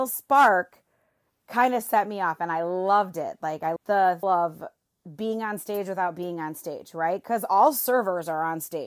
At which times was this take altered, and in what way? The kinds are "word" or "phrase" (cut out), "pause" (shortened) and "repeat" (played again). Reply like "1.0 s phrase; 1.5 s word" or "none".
3.8 s word; 4.2 s word